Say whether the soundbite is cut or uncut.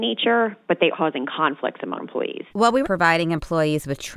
cut